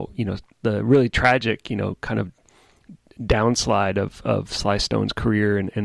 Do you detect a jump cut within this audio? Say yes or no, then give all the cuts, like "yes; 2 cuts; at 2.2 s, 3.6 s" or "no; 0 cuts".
no; 0 cuts